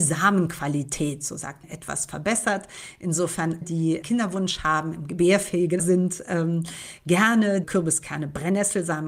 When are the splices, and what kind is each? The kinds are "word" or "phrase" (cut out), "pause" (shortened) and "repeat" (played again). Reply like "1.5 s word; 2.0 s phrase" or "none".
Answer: 1.6 s word; 3.6 s word; 4.0 s word; 5.8 s word; 7.6 s word